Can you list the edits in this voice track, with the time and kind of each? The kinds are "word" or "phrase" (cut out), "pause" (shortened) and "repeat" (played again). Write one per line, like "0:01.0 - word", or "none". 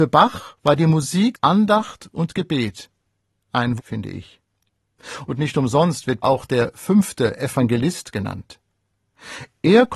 0:01.3 - word
0:03.8 - phrase
0:06.2 - phrase